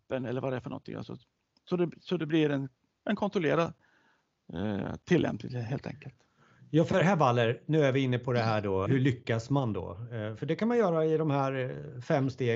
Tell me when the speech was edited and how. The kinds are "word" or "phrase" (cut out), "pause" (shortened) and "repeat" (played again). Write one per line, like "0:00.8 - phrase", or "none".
0:08.9 - word